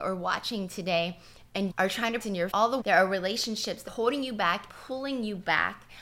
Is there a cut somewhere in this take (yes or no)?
yes